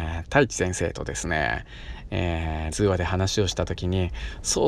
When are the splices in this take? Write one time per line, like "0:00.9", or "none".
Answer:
0:02.7

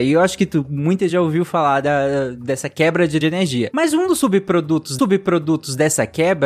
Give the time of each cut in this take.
0:01.1
0:03.2
0:05.0

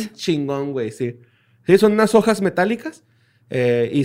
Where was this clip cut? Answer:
none

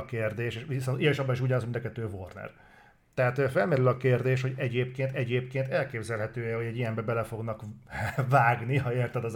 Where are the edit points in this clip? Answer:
0:05.1

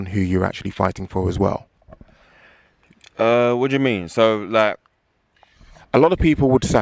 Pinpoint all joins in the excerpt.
none

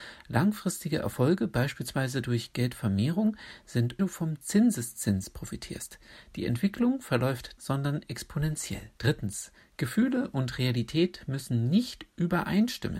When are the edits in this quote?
0:04.0
0:07.6
0:09.0

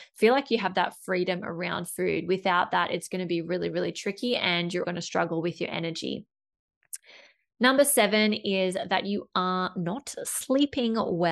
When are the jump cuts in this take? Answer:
0:04.8

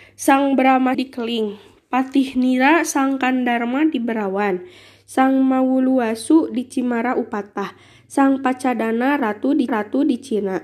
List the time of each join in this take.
0:00.9
0:09.7

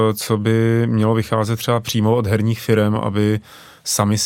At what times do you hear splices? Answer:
none

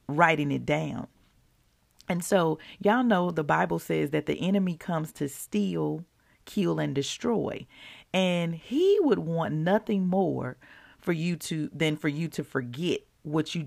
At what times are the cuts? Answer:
none

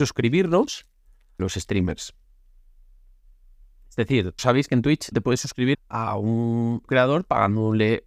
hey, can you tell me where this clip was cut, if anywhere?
0:01.4
0:04.4
0:05.1
0:05.7
0:06.9

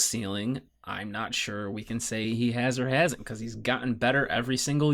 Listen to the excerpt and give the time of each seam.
none

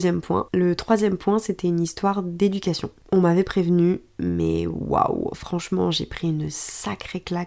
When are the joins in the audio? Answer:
none

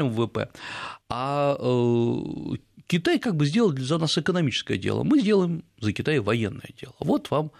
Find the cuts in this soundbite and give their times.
0:01.0

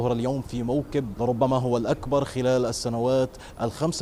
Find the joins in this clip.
0:01.1

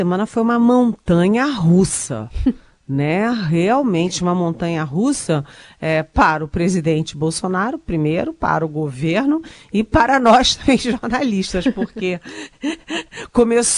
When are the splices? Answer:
none

